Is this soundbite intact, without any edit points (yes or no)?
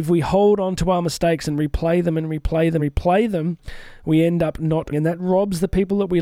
no